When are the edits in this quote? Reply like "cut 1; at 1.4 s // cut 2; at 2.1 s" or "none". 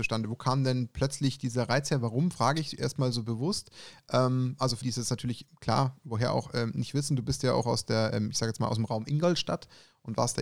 cut 1; at 4.8 s